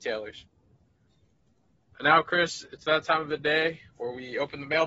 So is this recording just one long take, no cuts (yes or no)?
yes